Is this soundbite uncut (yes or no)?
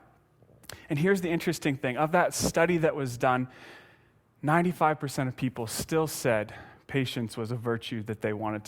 yes